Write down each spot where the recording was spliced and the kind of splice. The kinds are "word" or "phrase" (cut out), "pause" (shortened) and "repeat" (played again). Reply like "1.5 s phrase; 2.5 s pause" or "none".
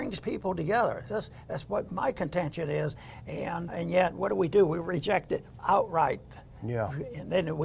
1.9 s word; 3.7 s word